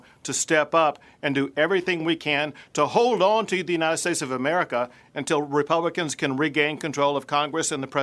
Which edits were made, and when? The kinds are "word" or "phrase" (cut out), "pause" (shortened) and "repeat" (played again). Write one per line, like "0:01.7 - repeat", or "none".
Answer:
none

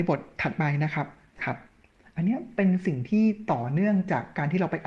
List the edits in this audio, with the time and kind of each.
0:01.4 - phrase

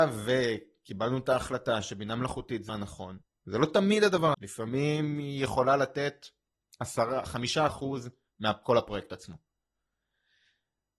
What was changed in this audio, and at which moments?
0:02.7 - word
0:03.2 - pause
0:04.3 - word
0:07.7 - word

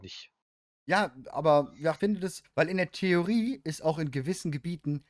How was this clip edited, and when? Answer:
0:02.0 - word
0:02.4 - phrase

